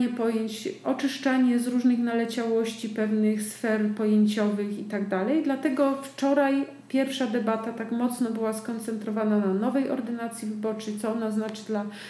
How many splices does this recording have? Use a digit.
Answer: 0